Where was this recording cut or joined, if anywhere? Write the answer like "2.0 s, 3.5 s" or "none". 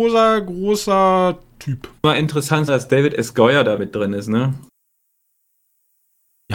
2.0 s, 2.7 s, 3.8 s